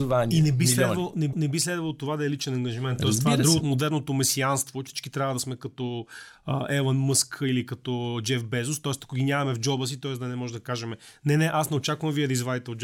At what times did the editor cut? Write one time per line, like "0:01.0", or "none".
0:01.3
0:03.6
0:04.9